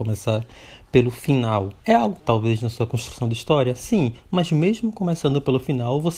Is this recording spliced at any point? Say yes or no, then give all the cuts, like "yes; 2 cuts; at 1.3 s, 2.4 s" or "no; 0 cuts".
yes; 2 cuts; at 1.8 s, 2.2 s